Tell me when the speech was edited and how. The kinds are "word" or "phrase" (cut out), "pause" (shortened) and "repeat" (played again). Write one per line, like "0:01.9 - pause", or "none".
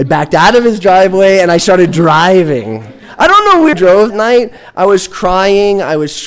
0:03.7 - word
0:04.1 - word